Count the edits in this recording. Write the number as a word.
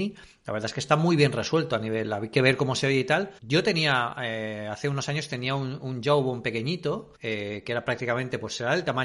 two